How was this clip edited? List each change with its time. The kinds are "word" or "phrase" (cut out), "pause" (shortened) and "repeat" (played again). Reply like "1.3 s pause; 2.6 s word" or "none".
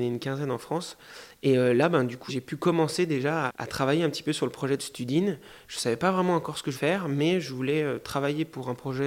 2.3 s word; 3.5 s word; 6.7 s word